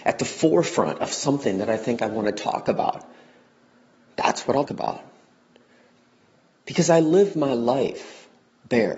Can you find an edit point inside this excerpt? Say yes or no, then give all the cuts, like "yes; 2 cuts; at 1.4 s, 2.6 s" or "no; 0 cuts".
yes; 1 cut; at 4.7 s